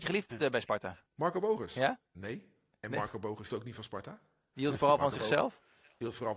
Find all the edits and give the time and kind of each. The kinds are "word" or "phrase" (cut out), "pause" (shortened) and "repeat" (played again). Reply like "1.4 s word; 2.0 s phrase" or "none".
1.1 s pause; 2.1 s pause; 3.5 s word